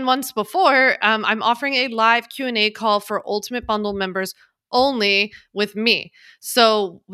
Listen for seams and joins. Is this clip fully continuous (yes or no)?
yes